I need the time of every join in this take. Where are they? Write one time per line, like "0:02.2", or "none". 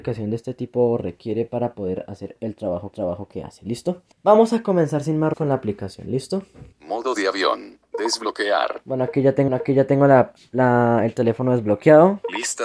0:02.9
0:04.1
0:05.3
0:06.7
0:07.8
0:09.5